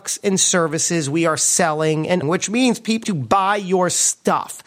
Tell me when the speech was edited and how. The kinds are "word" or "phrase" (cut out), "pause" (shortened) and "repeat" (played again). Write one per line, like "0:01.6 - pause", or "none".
0:02.2 - word
0:03.0 - word